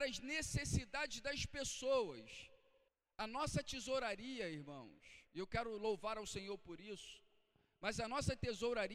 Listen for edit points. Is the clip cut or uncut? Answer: cut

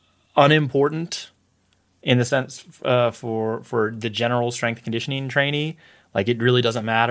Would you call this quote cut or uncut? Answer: uncut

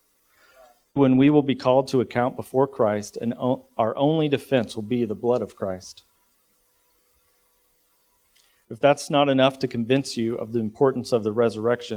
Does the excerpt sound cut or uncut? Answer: cut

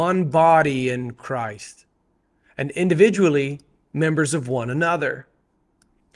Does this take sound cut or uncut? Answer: uncut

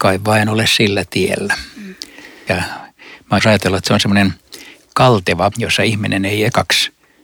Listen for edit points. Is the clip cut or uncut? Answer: cut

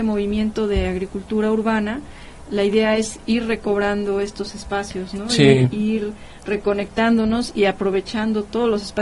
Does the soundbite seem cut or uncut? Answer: uncut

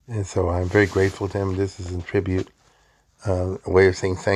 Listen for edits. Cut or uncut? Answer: uncut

